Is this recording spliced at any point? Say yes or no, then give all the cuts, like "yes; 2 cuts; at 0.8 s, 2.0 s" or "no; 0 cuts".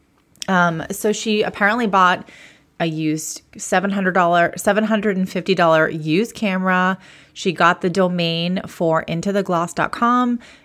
no; 0 cuts